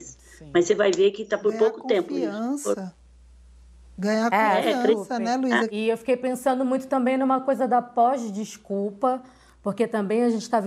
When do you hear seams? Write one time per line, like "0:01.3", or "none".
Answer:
none